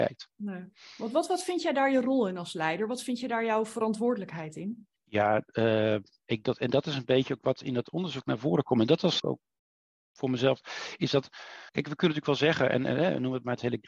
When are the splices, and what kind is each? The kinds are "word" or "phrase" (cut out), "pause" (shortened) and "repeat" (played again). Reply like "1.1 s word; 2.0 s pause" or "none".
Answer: 5.0 s pause; 6.4 s word; 9.2 s phrase; 11.7 s pause